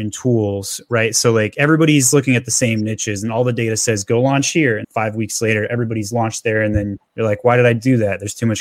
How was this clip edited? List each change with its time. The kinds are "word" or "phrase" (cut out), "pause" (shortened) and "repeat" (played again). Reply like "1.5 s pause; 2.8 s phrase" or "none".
4.8 s word; 7.1 s pause